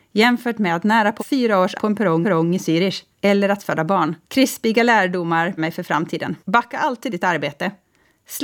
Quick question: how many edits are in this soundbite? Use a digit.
8